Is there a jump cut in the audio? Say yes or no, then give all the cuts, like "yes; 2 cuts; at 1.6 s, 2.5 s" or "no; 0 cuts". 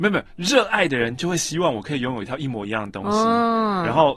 no; 0 cuts